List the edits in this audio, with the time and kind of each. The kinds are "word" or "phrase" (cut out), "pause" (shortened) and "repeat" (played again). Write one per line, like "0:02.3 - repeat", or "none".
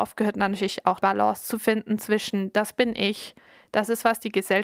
0:01.0 - phrase